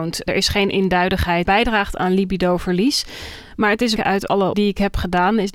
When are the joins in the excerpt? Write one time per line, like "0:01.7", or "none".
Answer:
0:01.4
0:04.0
0:04.5